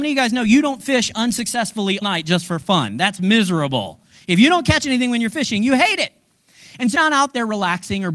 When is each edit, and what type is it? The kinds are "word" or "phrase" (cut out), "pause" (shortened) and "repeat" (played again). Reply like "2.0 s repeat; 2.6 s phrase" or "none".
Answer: 2.0 s word; 6.9 s word